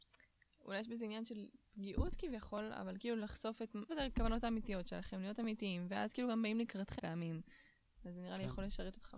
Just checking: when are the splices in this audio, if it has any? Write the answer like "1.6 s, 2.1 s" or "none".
3.9 s, 7.0 s